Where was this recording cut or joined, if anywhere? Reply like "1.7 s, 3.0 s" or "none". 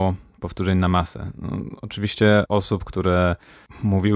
2.5 s